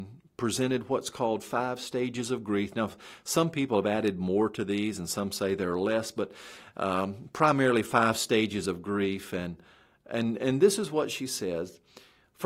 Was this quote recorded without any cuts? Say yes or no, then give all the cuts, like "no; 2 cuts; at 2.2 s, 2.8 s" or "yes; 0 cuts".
yes; 0 cuts